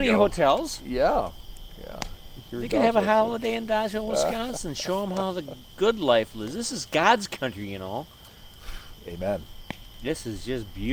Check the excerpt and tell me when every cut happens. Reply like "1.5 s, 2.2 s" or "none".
none